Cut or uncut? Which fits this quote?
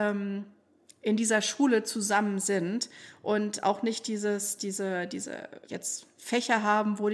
cut